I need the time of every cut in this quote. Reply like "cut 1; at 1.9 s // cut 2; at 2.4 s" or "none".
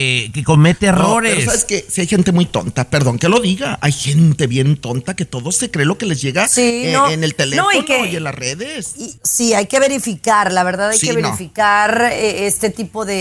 cut 1; at 9.2 s